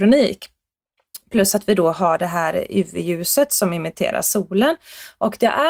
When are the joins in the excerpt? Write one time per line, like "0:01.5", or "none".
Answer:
none